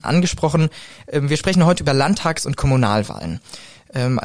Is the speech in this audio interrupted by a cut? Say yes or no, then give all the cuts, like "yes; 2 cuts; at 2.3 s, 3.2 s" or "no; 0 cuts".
no; 0 cuts